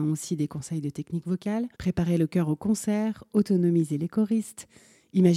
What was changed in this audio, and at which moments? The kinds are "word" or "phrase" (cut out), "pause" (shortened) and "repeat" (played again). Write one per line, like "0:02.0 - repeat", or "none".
0:01.7 - pause